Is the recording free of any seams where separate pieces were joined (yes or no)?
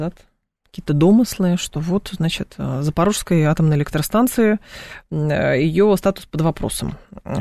yes